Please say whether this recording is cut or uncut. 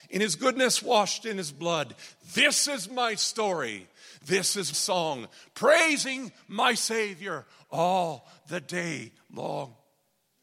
cut